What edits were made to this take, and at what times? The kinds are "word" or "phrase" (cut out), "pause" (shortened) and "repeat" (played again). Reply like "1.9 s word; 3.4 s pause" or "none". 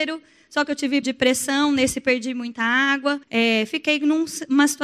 1.0 s word; 2.0 s word; 3.2 s pause

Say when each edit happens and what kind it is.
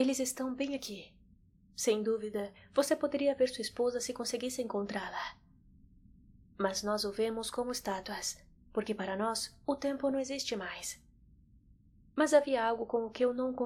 none

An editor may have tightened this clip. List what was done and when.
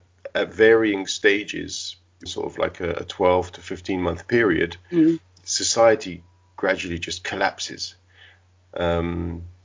2.3 s word

